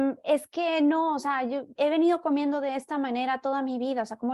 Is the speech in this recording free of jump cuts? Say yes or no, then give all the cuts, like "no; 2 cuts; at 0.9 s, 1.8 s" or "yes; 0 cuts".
no; 1 cut; at 1.8 s